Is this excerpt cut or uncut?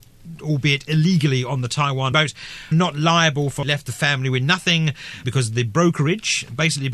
cut